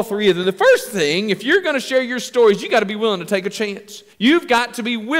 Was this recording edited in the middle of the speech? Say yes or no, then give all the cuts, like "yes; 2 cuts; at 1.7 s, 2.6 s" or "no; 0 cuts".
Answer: yes; 1 cut; at 4.1 s